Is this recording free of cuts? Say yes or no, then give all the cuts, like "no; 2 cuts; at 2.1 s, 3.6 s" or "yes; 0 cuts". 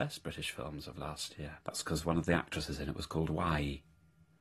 no; 1 cut; at 1.6 s